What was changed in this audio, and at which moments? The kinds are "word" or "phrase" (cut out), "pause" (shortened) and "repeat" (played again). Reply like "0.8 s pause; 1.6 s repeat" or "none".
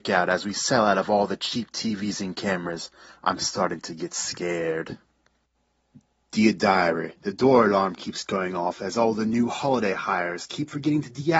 none